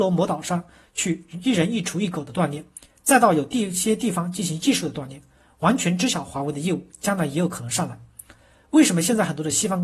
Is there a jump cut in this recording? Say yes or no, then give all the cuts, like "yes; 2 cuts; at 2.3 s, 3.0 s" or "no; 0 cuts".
no; 0 cuts